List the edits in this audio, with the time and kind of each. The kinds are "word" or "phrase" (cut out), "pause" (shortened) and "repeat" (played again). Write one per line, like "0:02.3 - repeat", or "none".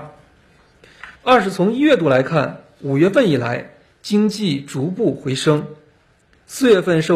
0:01.2 - pause